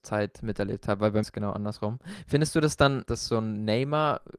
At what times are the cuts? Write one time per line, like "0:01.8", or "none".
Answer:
0:01.2
0:03.1